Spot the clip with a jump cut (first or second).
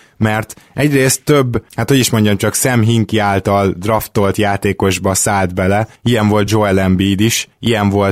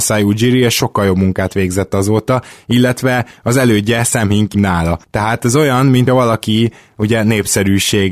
second